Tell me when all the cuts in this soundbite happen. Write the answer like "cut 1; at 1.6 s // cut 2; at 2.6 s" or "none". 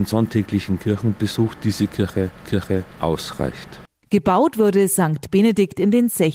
cut 1; at 2.4 s